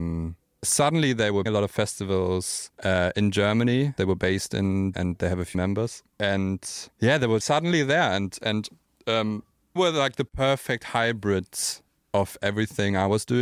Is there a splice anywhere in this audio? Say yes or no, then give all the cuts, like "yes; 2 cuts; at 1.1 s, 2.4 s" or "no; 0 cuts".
yes; 8 cuts; at 1.5 s, 2.7 s, 4.0 s, 4.9 s, 5.5 s, 6.9 s, 7.4 s, 9.8 s